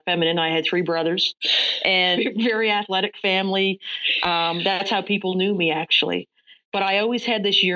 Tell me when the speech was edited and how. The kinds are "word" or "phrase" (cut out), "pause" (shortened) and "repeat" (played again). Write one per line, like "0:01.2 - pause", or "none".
none